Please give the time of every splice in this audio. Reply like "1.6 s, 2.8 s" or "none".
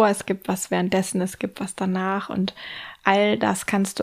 none